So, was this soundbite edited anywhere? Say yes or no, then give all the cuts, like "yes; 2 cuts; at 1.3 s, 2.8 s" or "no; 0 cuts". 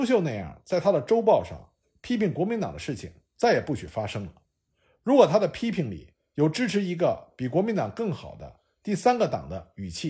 no; 0 cuts